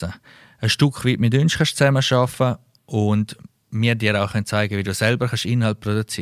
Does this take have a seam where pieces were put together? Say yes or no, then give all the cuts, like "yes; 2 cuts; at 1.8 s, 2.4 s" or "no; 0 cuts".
no; 0 cuts